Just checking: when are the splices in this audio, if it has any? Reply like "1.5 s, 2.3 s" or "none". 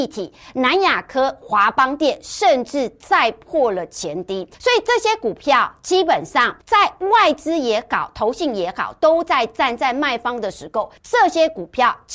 4.5 s, 6.6 s, 11.0 s